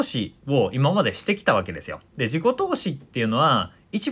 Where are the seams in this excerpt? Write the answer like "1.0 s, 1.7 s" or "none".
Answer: 2.1 s